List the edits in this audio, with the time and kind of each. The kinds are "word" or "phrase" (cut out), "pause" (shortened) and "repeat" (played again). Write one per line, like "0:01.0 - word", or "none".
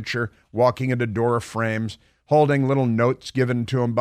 none

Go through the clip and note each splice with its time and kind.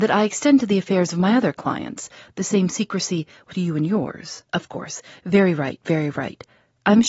0:03.5 - phrase
0:04.5 - pause

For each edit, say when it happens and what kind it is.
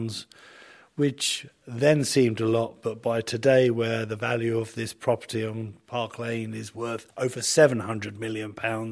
0:07.1 - pause

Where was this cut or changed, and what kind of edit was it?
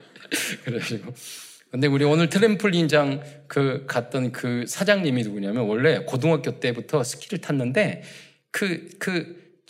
none

